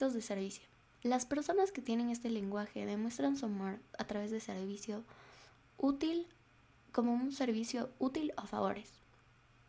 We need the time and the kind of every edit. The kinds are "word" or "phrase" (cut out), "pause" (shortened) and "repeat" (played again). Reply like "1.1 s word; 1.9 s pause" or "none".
none